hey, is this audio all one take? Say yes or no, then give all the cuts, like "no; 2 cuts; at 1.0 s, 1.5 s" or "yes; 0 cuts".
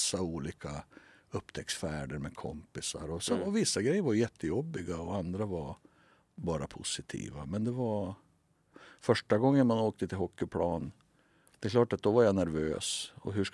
yes; 0 cuts